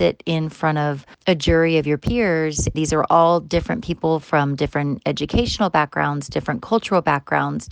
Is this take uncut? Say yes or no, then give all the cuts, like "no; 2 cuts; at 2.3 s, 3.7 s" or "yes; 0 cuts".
no; 2 cuts; at 1.1 s, 2.7 s